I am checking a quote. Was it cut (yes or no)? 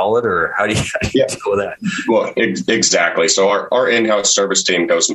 no